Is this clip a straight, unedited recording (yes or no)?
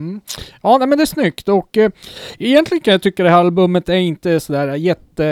yes